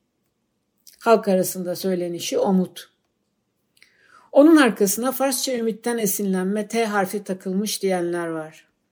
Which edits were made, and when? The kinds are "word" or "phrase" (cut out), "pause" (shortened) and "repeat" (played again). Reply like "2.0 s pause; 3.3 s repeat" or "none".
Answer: none